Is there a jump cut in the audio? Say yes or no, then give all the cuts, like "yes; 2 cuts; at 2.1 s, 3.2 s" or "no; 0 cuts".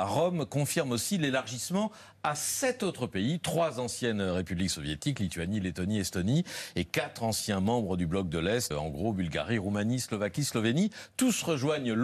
yes; 1 cut; at 8.7 s